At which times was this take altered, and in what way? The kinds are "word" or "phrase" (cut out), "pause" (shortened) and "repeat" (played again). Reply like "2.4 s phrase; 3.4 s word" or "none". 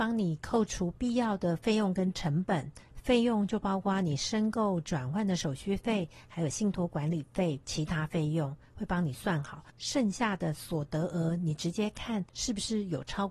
7.6 s pause; 12.3 s pause